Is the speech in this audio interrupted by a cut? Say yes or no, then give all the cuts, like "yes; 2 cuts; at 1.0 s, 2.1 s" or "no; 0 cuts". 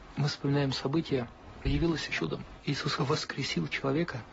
yes; 3 cuts; at 1.6 s, 2.1 s, 3.0 s